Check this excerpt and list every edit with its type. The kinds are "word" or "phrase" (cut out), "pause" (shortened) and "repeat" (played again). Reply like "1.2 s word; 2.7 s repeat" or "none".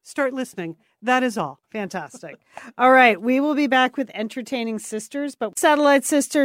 1.6 s pause